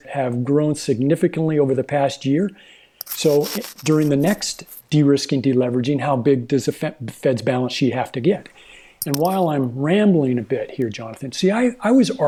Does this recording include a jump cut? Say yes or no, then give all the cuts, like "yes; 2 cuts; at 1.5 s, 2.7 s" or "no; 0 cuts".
no; 0 cuts